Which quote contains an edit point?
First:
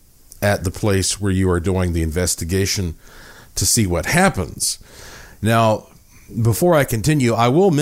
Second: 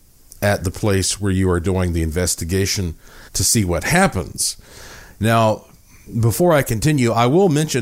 second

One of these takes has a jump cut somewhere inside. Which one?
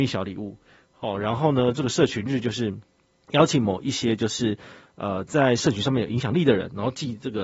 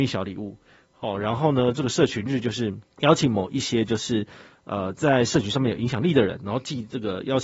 second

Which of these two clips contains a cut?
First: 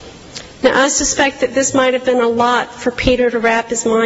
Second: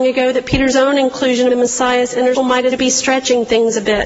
second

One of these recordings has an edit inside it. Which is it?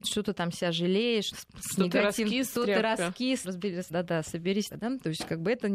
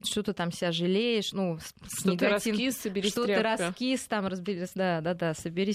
first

